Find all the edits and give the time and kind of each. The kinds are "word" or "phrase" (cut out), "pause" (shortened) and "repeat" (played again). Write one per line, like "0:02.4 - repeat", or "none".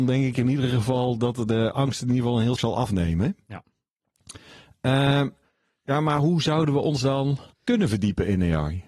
0:02.6 - word
0:07.5 - pause